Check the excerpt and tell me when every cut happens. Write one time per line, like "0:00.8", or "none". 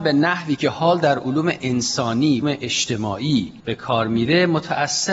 0:02.4
0:03.6